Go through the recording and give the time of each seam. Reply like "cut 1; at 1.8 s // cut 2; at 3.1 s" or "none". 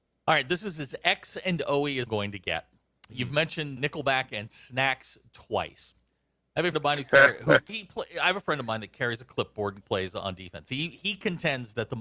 cut 1; at 2.1 s // cut 2; at 3.8 s // cut 3; at 6.7 s // cut 4; at 7.7 s // cut 5; at 9.8 s